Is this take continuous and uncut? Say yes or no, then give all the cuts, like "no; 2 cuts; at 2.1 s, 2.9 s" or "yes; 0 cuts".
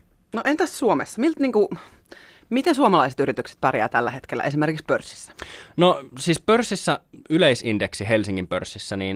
yes; 0 cuts